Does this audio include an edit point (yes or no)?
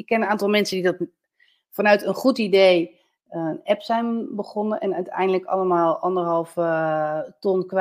no